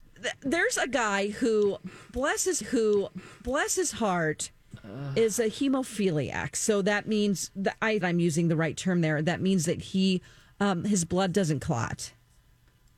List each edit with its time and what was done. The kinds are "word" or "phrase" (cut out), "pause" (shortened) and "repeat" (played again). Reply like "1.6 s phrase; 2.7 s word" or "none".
2.6 s repeat; 8.0 s phrase